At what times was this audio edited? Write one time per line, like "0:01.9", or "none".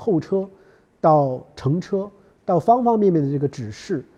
none